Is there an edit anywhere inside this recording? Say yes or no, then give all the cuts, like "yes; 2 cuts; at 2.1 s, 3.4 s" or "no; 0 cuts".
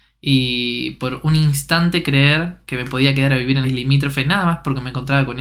yes; 1 cut; at 3.6 s